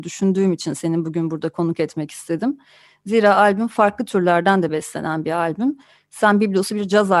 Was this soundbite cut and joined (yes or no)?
no